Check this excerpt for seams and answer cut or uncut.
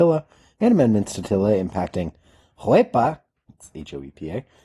uncut